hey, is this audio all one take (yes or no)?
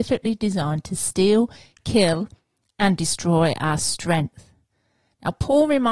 yes